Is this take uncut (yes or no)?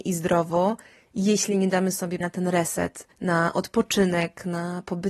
no